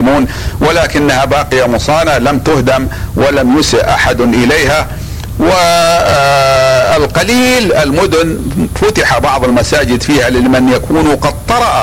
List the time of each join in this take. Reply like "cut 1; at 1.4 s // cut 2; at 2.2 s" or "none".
none